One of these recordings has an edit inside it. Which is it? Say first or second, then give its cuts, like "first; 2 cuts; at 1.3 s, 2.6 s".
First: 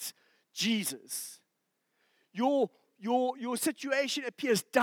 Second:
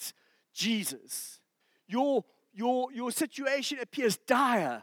second; 1 cut; at 1.6 s